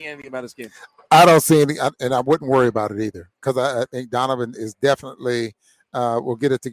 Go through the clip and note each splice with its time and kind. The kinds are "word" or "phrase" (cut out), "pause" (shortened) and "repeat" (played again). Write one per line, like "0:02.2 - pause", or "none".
none